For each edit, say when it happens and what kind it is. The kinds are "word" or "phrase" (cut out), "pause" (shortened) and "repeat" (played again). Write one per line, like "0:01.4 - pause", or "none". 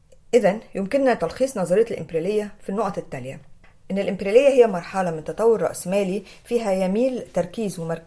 none